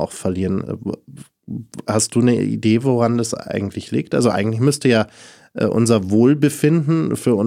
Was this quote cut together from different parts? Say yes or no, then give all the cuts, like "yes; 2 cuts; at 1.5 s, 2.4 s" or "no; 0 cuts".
no; 0 cuts